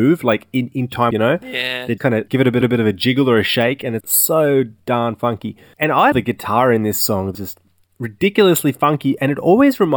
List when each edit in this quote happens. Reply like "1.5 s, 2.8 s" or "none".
1.1 s, 2.0 s, 2.3 s, 2.6 s, 4.0 s, 6.1 s, 7.3 s